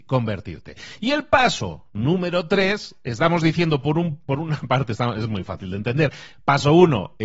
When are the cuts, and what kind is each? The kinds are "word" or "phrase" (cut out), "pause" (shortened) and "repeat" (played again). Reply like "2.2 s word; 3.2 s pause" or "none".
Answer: none